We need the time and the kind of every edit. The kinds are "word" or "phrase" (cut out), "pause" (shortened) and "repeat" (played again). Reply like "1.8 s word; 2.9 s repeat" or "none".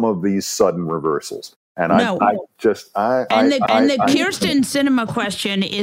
3.7 s repeat